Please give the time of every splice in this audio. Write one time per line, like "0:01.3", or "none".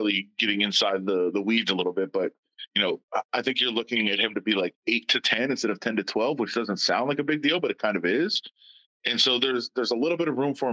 none

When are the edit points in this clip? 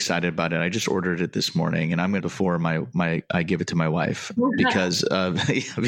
0:02.2
0:04.4

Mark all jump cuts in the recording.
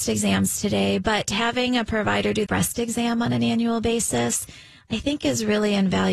0:02.5

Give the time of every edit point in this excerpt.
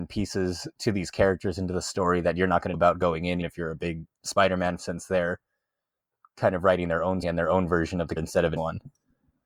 0:02.7
0:03.4
0:04.8
0:07.2
0:08.2
0:08.6

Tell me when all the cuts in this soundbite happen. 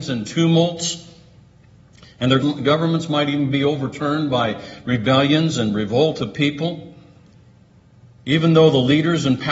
0:02.4

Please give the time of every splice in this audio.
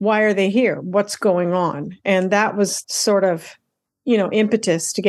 0:02.8

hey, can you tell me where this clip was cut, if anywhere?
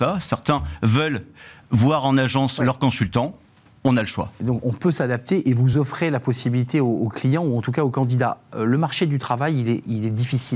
none

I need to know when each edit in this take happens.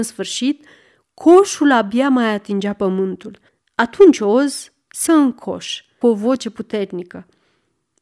0:03.5
0:05.1
0:06.0

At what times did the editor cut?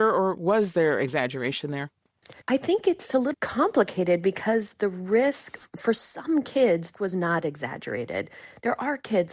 0:02.4
0:03.3
0:06.9

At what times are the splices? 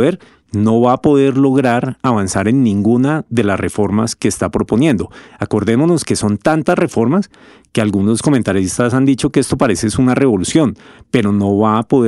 none

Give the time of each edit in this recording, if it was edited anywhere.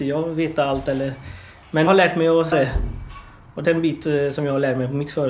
0:01.9
0:02.5
0:03.6

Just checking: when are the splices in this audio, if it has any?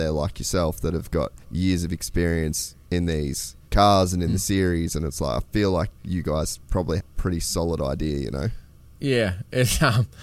0:01.4
0:03.6
0:07.0

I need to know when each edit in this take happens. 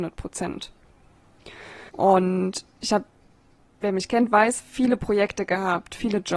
0:01.9
0:04.6

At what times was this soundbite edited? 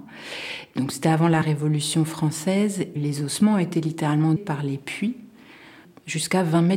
0:02.9
0:04.4

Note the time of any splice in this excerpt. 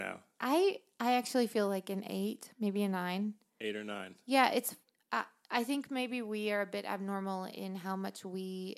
none

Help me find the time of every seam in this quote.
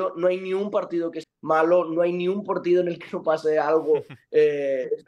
0:01.2

